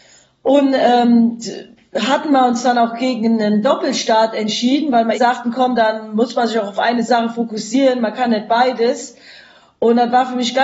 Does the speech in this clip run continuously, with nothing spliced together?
no; 1 cut; at 5.1 s

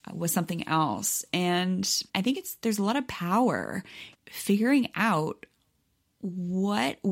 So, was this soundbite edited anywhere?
yes; 2 cuts; at 2.1 s, 4.1 s

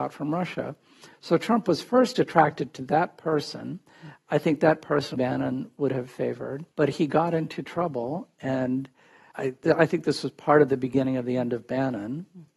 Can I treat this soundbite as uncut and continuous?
no; 3 cuts; at 5.1 s, 6.7 s, 9.3 s

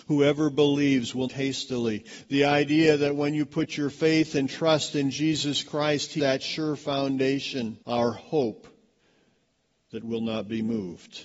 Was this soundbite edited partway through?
yes; 3 cuts; at 1.3 s, 6.2 s, 7.8 s

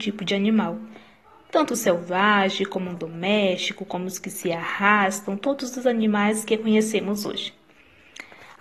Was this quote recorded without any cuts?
yes; 0 cuts

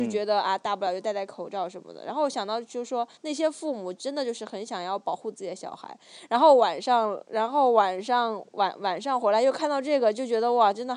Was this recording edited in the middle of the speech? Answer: yes; 1 cut; at 3.2 s

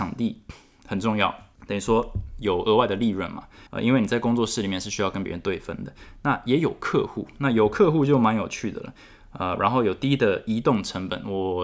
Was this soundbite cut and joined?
yes; 2 cuts; at 1.5 s, 3.7 s

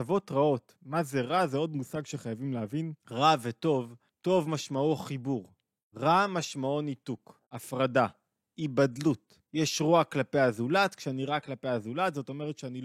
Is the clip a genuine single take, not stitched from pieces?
no; 5 cuts; at 3.0 s, 4.1 s, 5.8 s, 7.4 s, 9.4 s

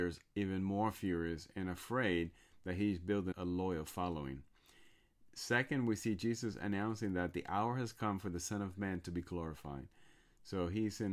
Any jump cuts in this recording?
yes; 1 cut; at 3.3 s

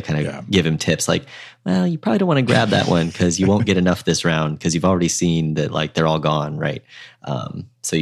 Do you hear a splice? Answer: no; 0 cuts

